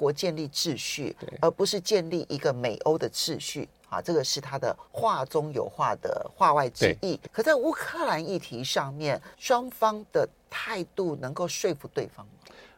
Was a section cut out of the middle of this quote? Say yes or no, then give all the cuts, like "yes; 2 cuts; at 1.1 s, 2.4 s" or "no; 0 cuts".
yes; 3 cuts; at 4.9 s, 7.3 s, 9.3 s